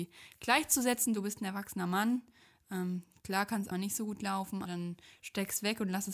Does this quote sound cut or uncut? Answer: cut